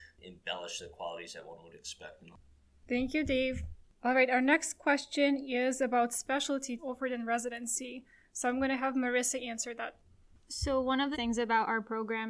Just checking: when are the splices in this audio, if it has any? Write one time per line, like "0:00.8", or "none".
0:06.8
0:11.1